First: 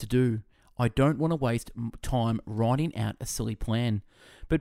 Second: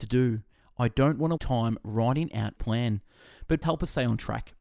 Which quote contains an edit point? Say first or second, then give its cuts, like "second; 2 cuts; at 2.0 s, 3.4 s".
second; 3 cuts; at 1.4 s, 2.6 s, 3.6 s